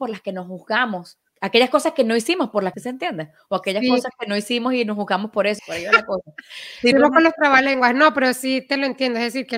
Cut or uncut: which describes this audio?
cut